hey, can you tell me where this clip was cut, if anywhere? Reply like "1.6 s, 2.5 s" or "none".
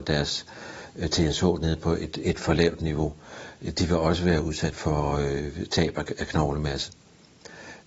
4.7 s